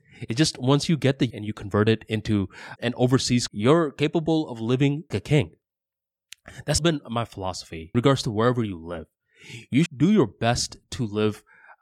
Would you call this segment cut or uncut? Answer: cut